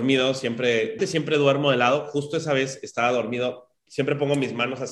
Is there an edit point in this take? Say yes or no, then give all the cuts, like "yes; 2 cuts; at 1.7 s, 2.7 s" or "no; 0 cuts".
yes; 1 cut; at 1.0 s